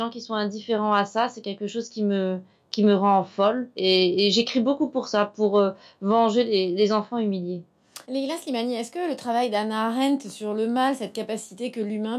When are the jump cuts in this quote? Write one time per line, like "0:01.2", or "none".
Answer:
0:08.0